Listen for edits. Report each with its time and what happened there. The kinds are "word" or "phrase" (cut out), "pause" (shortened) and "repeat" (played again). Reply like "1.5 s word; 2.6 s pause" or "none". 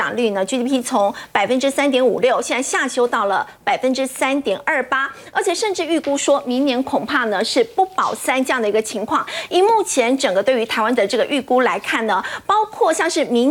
11.0 s word